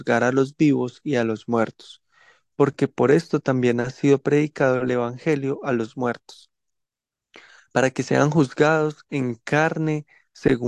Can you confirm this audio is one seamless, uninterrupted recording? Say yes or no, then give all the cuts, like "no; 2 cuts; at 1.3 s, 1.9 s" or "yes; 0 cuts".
yes; 0 cuts